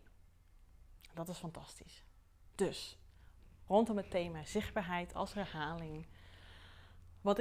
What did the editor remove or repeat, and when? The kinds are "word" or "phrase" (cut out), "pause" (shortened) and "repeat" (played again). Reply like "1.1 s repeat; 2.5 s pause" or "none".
2.5 s pause

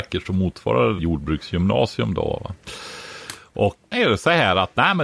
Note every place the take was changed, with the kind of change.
1.0 s word; 3.9 s phrase

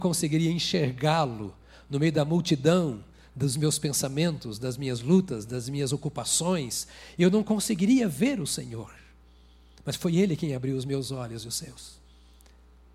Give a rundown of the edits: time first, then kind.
none

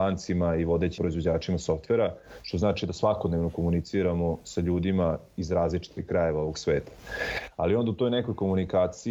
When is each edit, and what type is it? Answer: 1.0 s word

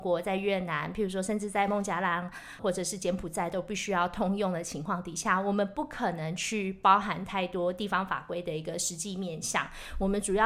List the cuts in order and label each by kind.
2.6 s word

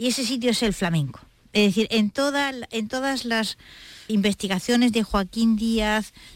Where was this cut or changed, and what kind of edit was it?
4.1 s word

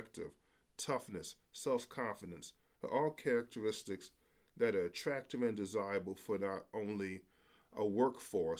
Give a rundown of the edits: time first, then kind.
none

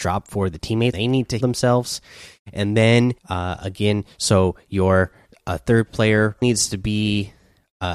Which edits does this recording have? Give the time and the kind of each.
0.9 s word; 1.4 s word; 3.2 s pause; 6.4 s word

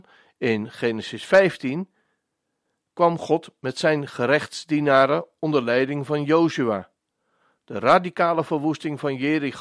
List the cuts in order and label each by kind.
none

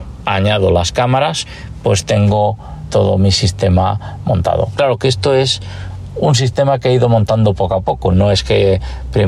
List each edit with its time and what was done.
2.9 s word

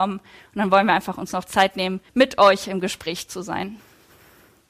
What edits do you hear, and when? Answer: 2.1 s pause

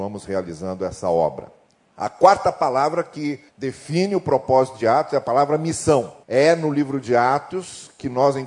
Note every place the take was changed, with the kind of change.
1.7 s pause; 3.5 s pause; 6.2 s pause

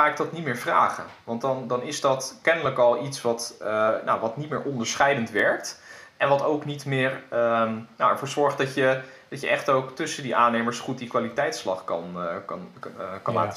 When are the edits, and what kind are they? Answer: none

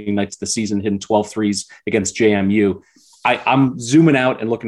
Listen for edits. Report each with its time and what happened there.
none

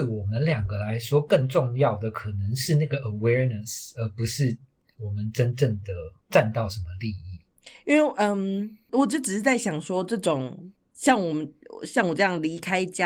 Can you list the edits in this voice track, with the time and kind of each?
none

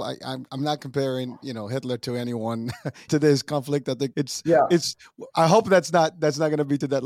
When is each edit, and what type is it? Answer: 3.1 s word; 4.1 s word

